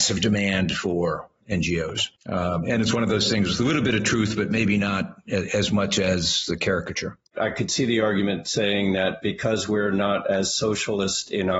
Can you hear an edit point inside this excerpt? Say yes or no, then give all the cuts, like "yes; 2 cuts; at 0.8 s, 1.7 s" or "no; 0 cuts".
yes; 2 cuts; at 2.2 s, 7.3 s